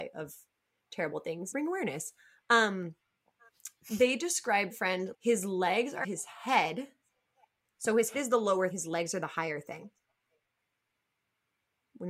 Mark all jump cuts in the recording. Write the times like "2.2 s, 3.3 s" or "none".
1.5 s, 4.7 s, 5.1 s, 6.0 s, 8.1 s, 8.7 s